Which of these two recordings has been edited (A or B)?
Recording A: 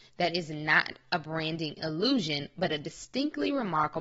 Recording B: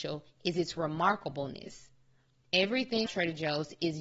B